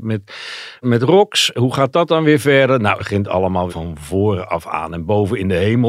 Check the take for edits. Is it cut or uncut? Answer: cut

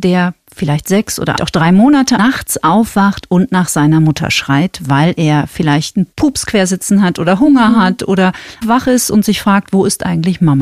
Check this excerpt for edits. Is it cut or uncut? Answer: cut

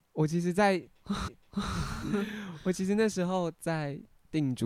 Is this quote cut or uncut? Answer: cut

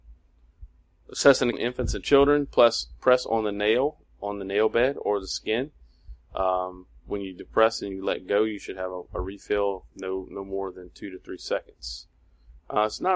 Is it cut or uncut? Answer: cut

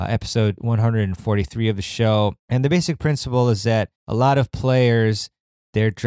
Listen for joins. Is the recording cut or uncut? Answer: cut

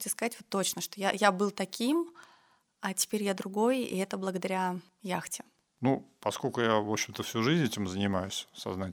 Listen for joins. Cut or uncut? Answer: uncut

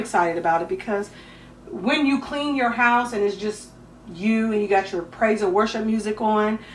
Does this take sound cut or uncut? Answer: uncut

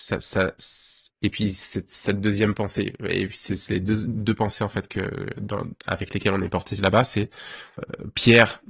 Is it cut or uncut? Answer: uncut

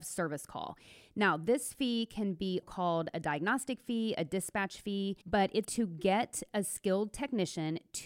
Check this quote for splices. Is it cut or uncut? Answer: cut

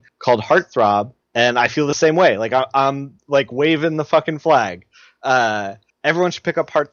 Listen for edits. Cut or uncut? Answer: uncut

